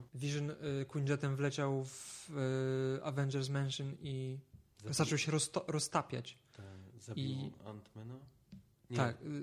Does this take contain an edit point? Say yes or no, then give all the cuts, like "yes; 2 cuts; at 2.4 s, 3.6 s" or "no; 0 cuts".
no; 0 cuts